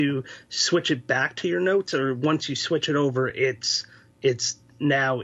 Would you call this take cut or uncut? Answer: uncut